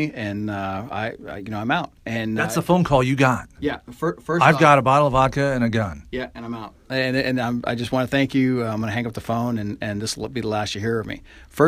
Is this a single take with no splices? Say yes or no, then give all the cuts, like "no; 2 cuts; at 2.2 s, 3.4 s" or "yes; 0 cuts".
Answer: no; 1 cut; at 2.0 s